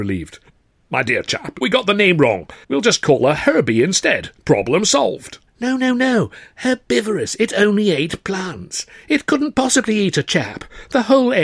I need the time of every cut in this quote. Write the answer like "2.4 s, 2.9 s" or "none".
1.6 s, 2.6 s, 4.4 s, 5.5 s